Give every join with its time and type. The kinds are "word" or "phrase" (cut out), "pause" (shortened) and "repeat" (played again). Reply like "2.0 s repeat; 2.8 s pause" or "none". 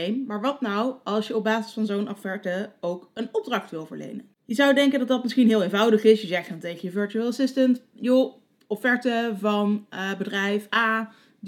none

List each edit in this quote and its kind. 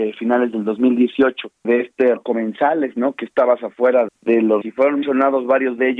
1.6 s word; 2.2 s word; 4.1 s word; 4.6 s word; 5.0 s word

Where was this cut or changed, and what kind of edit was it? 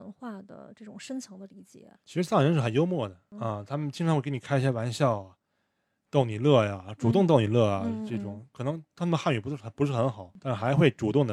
2.0 s pause

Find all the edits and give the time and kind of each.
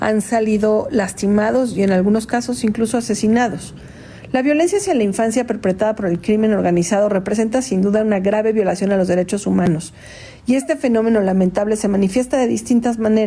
none

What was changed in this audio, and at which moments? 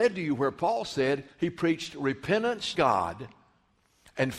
1.3 s pause; 2.7 s word

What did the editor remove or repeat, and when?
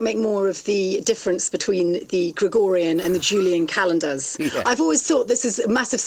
none

